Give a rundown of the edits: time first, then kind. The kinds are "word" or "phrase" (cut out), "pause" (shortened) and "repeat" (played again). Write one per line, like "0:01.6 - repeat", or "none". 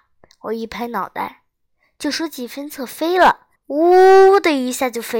0:03.6 - pause